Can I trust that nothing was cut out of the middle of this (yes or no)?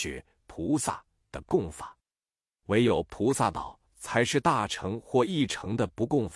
no